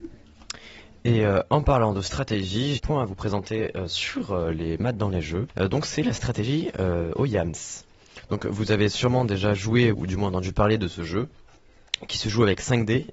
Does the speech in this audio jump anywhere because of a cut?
yes; 3 cuts; at 2.8 s, 5.5 s, 9.9 s

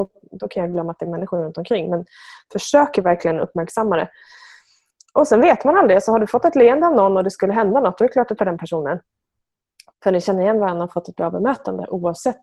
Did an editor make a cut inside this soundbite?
yes; 1 cut; at 8.4 s

